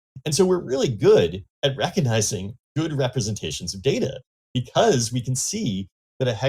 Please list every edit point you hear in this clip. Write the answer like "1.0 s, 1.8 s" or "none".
none

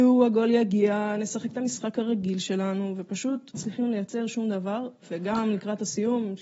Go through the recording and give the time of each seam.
3.5 s

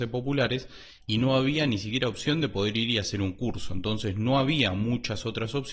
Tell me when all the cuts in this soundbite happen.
none

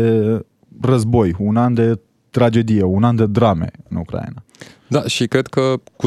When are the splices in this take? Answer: none

